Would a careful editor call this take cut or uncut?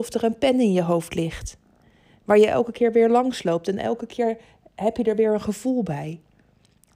uncut